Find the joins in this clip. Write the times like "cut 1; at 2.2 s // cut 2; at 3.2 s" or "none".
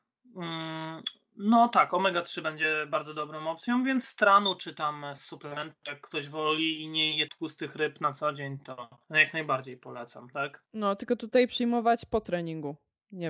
cut 1; at 7.3 s // cut 2; at 9.0 s // cut 3; at 10.7 s